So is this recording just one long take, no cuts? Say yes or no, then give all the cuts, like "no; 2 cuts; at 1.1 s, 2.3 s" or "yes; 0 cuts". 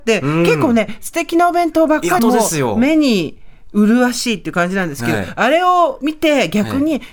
no; 1 cut; at 2.2 s